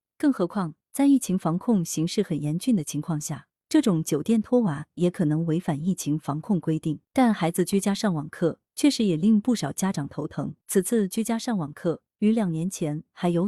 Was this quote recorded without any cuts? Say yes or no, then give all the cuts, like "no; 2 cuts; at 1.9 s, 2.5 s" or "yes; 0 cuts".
no; 3 cuts; at 7.0 s, 10.6 s, 12.1 s